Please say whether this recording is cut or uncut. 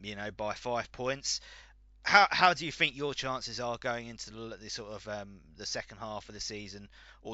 uncut